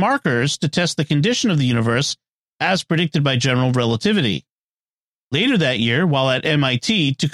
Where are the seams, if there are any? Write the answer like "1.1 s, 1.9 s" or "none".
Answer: none